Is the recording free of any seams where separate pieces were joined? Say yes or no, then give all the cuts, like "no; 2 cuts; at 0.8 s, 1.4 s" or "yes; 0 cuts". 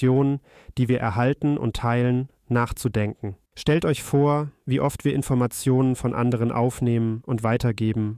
no; 1 cut; at 3.5 s